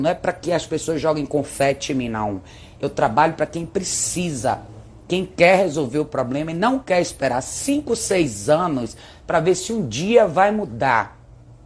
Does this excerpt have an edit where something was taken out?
no; 0 cuts

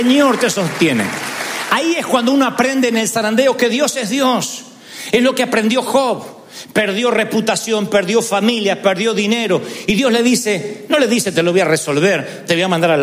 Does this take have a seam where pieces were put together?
no; 0 cuts

